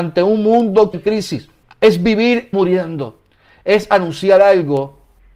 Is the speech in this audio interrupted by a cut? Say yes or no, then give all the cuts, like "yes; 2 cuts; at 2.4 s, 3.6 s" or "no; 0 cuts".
yes; 3 cuts; at 0.9 s, 1.6 s, 2.5 s